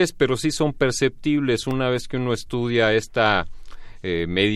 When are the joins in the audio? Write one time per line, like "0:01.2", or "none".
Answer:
none